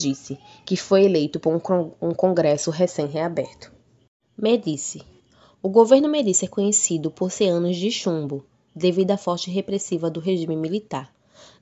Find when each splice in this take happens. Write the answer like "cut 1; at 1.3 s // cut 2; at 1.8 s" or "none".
none